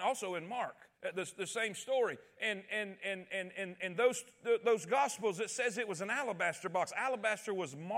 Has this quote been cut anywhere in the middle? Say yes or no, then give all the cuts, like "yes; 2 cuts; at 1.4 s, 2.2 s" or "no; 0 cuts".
yes; 1 cut; at 0.9 s